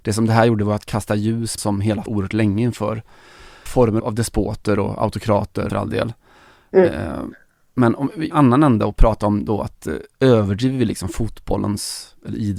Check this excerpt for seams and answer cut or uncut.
cut